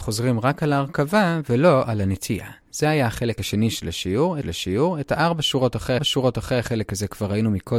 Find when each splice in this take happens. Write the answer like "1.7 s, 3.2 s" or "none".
4.4 s, 6.0 s